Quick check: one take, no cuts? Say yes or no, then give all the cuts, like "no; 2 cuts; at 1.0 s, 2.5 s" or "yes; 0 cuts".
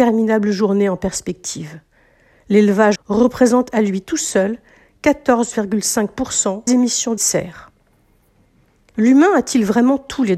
no; 3 cuts; at 3.0 s, 6.7 s, 7.2 s